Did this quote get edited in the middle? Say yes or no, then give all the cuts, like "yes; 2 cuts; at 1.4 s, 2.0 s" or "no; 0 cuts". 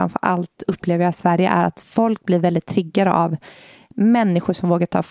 no; 0 cuts